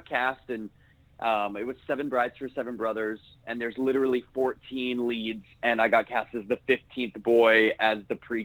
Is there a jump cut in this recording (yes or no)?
no